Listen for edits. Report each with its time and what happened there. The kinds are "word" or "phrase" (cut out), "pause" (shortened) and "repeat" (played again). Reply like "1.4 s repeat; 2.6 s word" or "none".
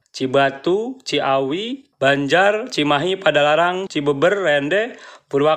1.9 s word; 3.9 s word